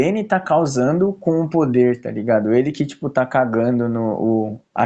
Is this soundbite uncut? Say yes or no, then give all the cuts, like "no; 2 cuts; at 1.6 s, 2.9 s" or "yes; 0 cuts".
yes; 0 cuts